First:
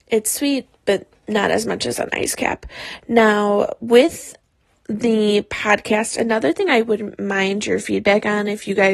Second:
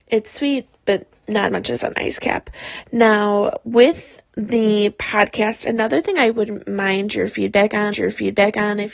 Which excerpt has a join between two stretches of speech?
second; 3 cuts; at 1.5 s, 4.3 s, 7.9 s

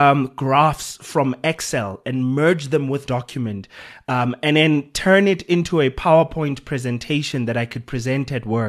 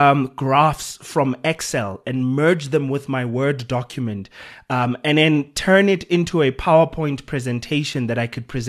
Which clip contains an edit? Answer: first; 1 cut; at 3.1 s

